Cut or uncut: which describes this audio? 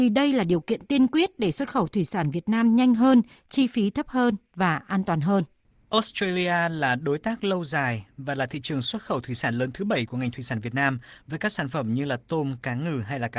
uncut